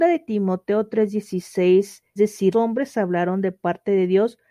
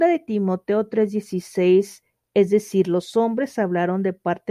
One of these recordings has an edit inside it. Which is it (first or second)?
first